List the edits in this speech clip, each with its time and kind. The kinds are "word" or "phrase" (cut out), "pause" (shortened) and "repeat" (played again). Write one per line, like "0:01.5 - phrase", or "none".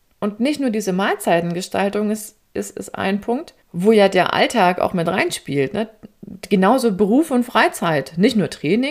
0:03.6 - pause

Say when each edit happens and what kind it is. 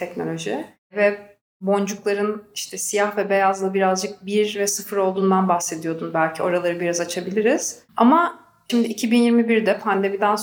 0:07.9 - pause

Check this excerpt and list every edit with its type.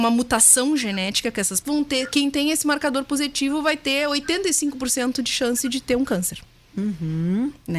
0:01.6 - phrase

